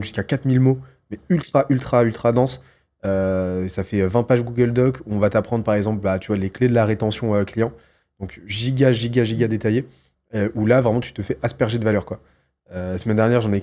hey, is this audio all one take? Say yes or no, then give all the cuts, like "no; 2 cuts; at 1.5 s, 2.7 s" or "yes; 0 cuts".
yes; 0 cuts